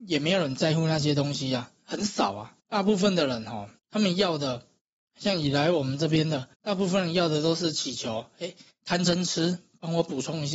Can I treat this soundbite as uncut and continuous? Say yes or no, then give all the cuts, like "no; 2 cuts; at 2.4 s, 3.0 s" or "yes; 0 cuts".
no; 4 cuts; at 2.6 s, 3.8 s, 4.8 s, 6.5 s